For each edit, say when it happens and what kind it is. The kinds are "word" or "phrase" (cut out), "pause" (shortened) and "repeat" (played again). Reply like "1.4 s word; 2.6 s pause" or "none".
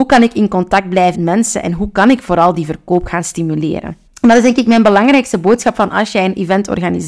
1.1 s word; 4.1 s pause